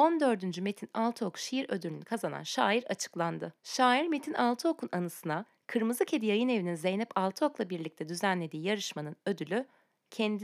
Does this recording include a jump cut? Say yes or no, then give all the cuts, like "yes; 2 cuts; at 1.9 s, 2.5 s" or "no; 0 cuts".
yes; 1 cut; at 3.6 s